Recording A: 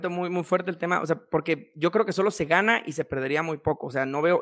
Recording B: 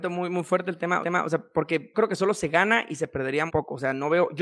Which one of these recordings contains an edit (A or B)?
B